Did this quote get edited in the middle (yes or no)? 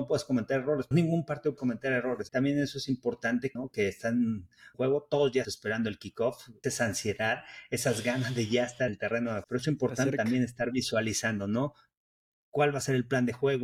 yes